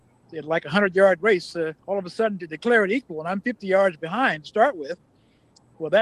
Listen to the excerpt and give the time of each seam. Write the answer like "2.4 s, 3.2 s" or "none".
1.8 s